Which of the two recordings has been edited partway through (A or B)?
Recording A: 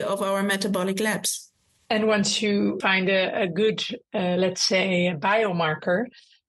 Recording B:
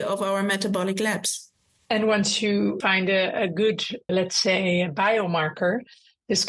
B